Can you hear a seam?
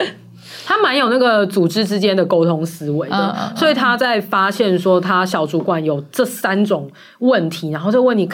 no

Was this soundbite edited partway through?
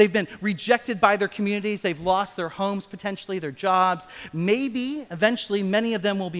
no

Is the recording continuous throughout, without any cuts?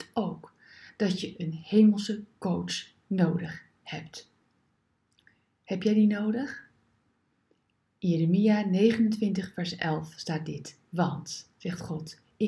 yes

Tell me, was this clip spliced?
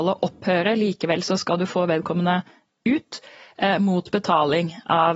no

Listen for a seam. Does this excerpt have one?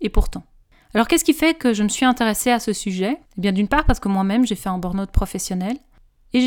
yes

